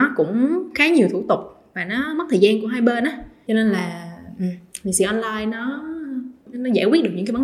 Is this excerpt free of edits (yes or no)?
no